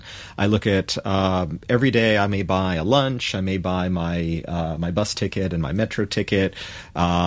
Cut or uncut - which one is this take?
uncut